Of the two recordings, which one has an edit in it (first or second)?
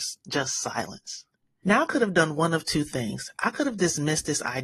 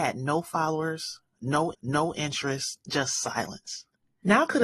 second